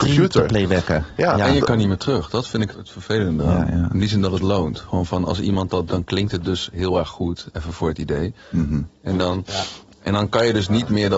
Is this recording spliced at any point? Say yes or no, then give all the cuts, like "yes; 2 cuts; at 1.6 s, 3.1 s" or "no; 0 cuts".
yes; 2 cuts; at 2.7 s, 5.9 s